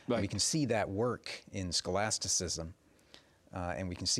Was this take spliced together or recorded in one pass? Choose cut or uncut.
uncut